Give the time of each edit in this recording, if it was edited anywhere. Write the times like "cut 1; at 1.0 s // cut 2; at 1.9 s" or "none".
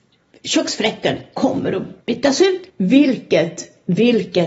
cut 1; at 2.0 s // cut 2; at 2.7 s